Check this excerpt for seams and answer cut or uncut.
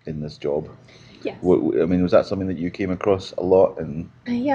uncut